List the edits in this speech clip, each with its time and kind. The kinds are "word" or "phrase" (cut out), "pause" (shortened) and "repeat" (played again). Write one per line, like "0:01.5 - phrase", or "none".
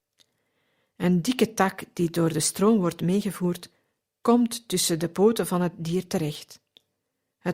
none